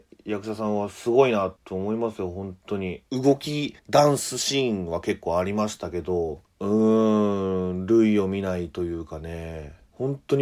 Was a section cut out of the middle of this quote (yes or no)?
yes